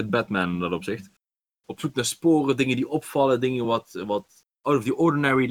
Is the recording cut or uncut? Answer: uncut